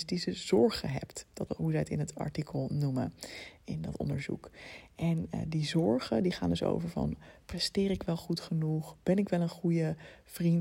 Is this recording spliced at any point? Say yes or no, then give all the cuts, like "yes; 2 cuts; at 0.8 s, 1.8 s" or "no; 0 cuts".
yes; 1 cut; at 1.5 s